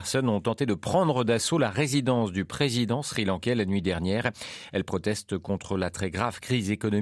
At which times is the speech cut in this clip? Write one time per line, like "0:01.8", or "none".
none